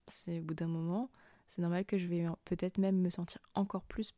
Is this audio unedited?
yes; 0 cuts

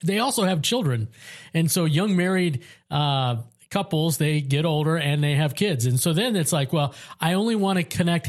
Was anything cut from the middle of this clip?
no; 0 cuts

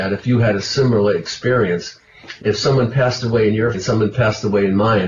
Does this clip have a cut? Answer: yes; 2 cuts; at 2.4 s, 3.7 s

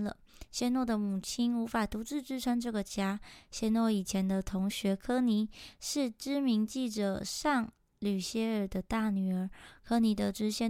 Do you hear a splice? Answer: no; 0 cuts

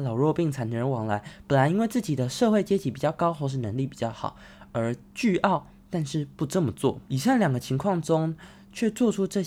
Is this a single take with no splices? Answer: no; 1 cut; at 7.1 s

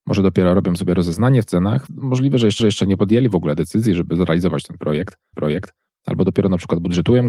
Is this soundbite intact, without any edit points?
no; 3 cuts; at 1.9 s, 2.6 s, 5.3 s

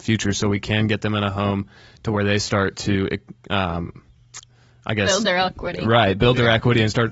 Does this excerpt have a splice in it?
no; 0 cuts

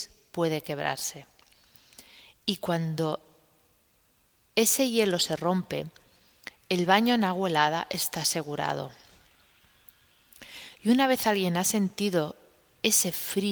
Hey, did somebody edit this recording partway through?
no; 0 cuts

